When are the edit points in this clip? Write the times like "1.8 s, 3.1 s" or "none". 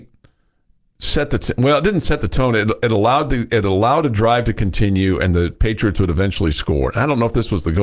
none